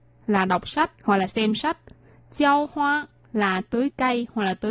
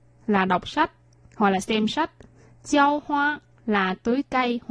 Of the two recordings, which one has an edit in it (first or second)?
first